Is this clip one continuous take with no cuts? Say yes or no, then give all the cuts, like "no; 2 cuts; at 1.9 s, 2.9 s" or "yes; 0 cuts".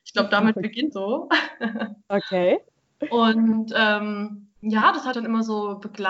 no; 4 cuts; at 0.9 s, 2.7 s, 4.6 s, 5.1 s